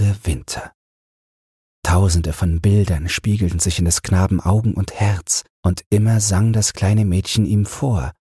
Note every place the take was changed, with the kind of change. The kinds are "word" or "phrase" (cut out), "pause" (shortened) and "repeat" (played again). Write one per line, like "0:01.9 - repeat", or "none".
0:05.5 - pause